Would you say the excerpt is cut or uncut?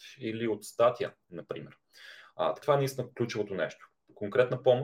cut